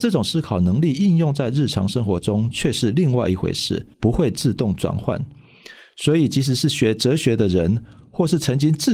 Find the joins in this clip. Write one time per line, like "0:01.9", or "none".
0:03.9